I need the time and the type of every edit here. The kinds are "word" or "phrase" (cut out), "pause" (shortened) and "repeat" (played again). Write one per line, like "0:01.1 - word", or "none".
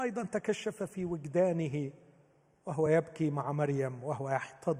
none